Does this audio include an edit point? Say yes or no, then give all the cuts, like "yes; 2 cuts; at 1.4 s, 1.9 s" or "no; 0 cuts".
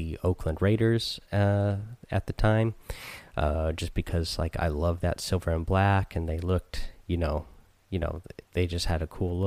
yes; 2 cuts; at 7.8 s, 8.4 s